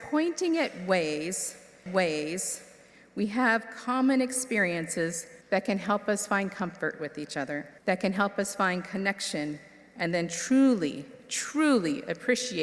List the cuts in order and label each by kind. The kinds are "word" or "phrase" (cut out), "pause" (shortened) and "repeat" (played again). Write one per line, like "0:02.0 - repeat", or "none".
0:01.9 - repeat
0:05.4 - pause
0:07.8 - pause

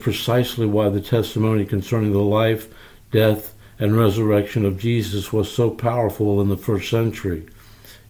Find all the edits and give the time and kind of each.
none

